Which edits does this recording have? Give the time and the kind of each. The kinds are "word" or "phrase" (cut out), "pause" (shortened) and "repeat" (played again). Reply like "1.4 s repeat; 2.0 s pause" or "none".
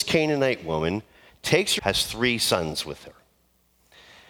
1.8 s phrase